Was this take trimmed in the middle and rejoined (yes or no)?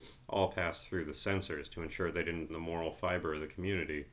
yes